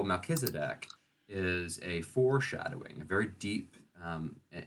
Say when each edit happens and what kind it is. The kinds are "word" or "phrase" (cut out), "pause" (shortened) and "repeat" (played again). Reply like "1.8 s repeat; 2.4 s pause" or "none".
none